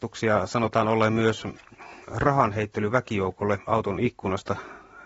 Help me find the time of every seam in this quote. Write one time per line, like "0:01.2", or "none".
0:02.0